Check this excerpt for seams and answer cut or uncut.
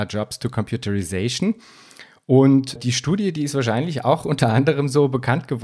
cut